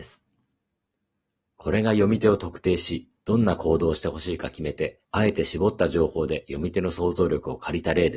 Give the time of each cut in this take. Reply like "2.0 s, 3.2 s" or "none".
3.2 s, 5.0 s

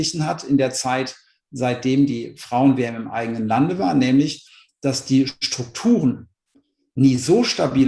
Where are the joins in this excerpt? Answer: none

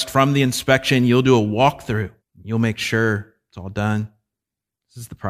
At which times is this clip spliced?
2.2 s

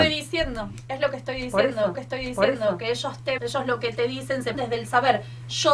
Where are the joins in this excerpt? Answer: 1.9 s, 3.4 s, 4.5 s

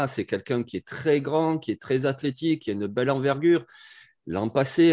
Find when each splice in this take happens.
none

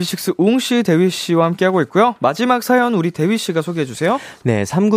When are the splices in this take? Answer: none

